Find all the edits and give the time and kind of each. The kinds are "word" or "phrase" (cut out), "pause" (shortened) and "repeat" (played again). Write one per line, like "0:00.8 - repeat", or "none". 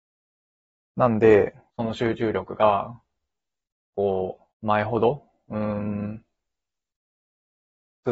0:01.7 - phrase
0:04.5 - pause